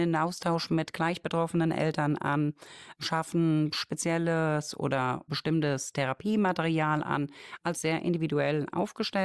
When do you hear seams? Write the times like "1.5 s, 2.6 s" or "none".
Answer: 7.7 s